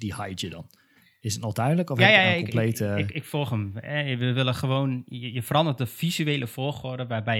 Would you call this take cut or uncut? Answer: uncut